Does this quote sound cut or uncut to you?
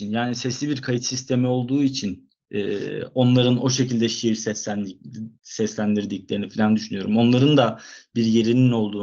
cut